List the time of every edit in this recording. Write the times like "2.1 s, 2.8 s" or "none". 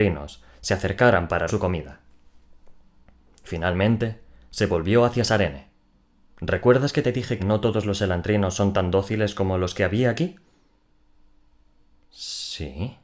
1.5 s, 6.0 s, 7.4 s